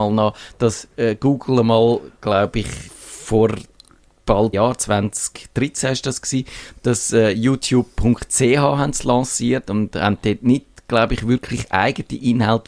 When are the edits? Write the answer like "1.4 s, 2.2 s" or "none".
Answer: 2.9 s, 4.5 s